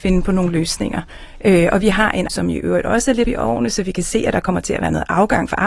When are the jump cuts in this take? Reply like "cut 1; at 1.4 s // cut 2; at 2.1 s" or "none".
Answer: cut 1; at 2.3 s // cut 2; at 3.2 s